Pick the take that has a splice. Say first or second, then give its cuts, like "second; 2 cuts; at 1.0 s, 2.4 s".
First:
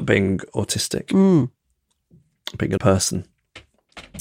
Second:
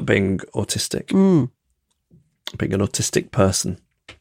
first; 1 cut; at 2.8 s